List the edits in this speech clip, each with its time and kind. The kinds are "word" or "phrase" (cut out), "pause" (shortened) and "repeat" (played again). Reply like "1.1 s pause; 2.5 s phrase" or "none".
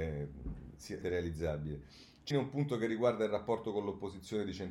1.0 s phrase; 2.3 s word

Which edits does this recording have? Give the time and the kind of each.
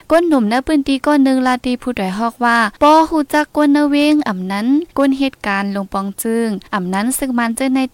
2.8 s pause; 4.9 s pause; 6.7 s pause

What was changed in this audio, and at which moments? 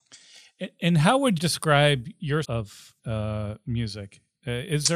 1.4 s word; 2.4 s word; 3.0 s phrase

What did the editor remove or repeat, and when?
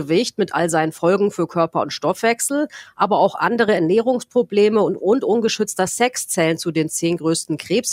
none

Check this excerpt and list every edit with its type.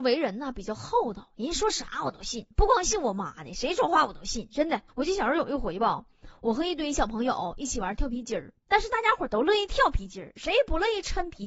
4.9 s pause; 8.6 s pause

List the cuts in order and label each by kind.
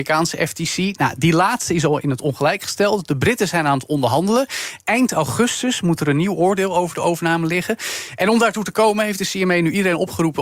none

